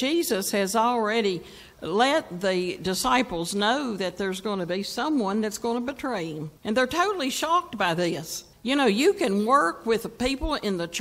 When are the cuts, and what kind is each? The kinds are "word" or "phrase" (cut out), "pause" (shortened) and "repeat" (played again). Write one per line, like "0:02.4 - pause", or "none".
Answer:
0:06.6 - pause
0:08.5 - pause

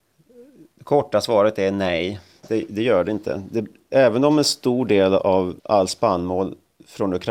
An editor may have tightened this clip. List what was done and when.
0:05.6 - pause

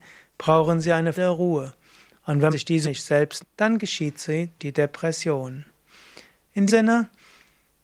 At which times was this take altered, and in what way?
0:01.1 - word
0:02.5 - word
0:02.8 - word
0:03.4 - word
0:04.6 - word
0:06.7 - word

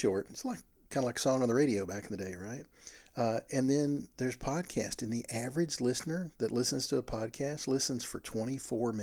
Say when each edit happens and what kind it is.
none

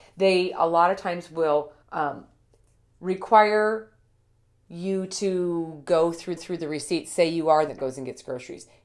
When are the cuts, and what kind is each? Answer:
0:01.8 - pause
0:06.4 - repeat
0:07.7 - word

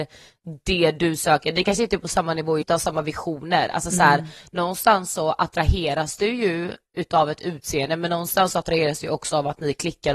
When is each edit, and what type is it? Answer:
0:02.6 - phrase

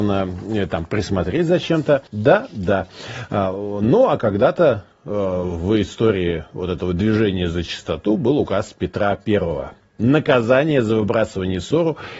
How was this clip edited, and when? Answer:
0:02.1 - pause
0:04.9 - pause

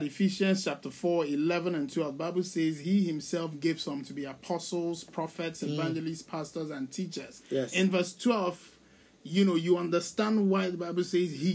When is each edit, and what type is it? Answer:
none

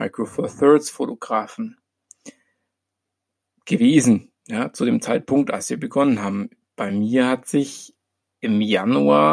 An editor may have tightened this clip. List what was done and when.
none

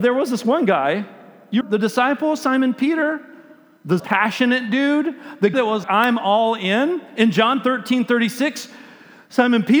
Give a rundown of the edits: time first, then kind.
0:01.6 - word
0:04.0 - word
0:05.5 - word
0:05.8 - word

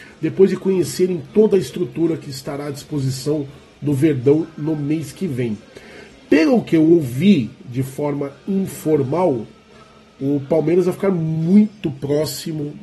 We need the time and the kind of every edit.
none

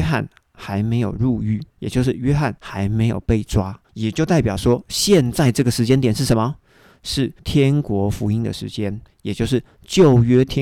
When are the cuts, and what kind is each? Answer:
0:01.7 - pause
0:02.6 - pause
0:03.8 - pause
0:07.4 - pause

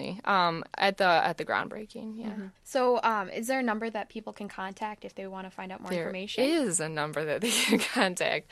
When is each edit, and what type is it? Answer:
0:02.6 - pause

